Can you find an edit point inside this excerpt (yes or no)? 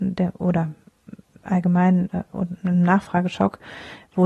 no